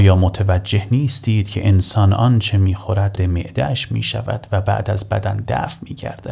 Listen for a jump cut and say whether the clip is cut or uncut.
cut